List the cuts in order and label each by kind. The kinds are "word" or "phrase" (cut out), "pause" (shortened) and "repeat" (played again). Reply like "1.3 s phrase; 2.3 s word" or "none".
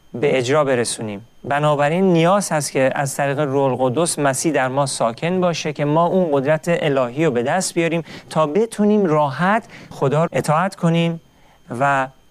9.9 s word; 10.3 s word